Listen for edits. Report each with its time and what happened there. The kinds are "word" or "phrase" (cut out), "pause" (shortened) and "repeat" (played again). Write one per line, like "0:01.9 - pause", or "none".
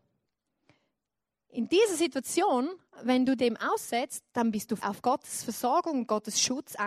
0:03.4 - word
0:04.8 - word

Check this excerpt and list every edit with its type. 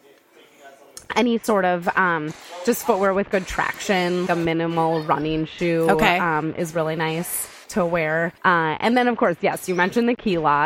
0:04.3 - word
0:07.6 - pause
0:08.4 - pause

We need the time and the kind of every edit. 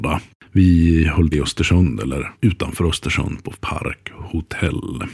0:01.3 - word
0:02.3 - word
0:03.5 - word

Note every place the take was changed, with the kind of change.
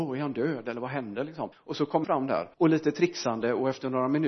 0:01.5 - pause
0:02.0 - word
0:02.5 - pause

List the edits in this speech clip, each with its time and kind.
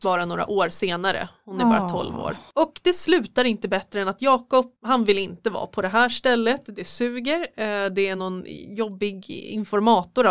none

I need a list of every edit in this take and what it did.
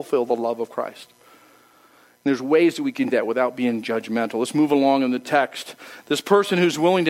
0:03.1 - word

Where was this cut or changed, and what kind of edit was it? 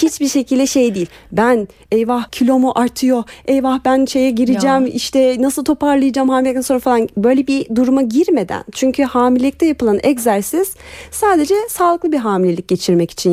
0:02.3 - pause

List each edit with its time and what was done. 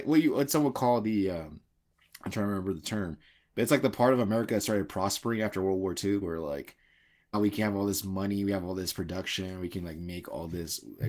0:06.2 - word
0:07.3 - word

